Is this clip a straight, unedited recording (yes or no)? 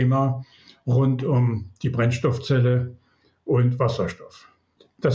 yes